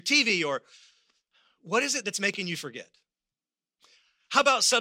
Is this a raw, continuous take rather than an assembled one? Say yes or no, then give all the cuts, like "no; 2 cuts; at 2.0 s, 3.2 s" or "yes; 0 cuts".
yes; 0 cuts